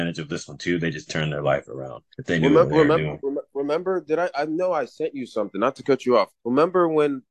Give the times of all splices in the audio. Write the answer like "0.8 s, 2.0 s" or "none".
1.1 s, 2.1 s, 6.4 s